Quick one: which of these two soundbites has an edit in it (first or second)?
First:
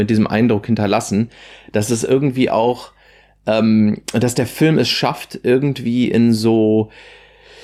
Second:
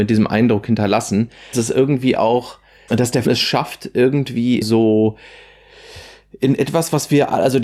second